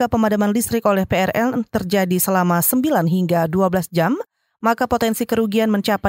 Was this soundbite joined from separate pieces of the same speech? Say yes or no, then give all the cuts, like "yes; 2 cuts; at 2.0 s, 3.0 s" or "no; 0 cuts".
no; 0 cuts